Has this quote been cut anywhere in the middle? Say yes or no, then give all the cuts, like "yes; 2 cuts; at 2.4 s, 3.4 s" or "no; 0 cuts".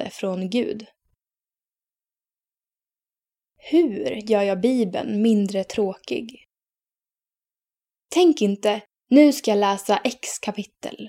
no; 0 cuts